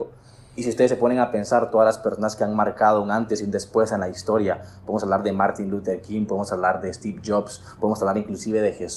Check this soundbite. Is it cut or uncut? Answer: uncut